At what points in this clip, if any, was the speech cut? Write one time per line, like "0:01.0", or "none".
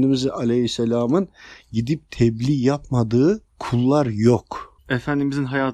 0:03.5
0:04.8